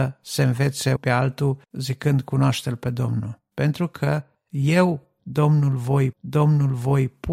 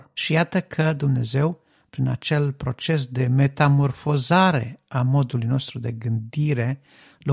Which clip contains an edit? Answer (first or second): first